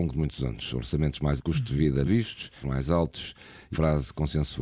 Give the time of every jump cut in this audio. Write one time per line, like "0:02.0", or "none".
0:01.4
0:02.1
0:02.6
0:03.7